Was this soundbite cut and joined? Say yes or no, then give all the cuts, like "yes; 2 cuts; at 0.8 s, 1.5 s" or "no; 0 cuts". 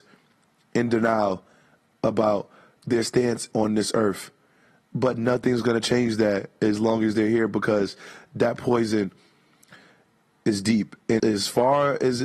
yes; 2 cuts; at 3.5 s, 11.2 s